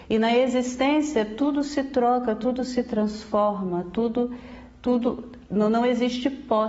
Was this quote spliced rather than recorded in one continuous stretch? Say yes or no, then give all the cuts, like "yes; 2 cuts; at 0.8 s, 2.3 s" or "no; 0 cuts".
no; 0 cuts